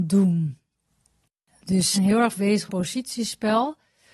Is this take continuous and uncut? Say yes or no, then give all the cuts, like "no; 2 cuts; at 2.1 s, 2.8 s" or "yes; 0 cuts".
no; 3 cuts; at 1.9 s, 2.4 s, 2.7 s